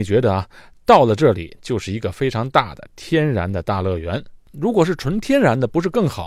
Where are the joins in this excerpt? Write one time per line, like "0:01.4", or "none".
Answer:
0:04.4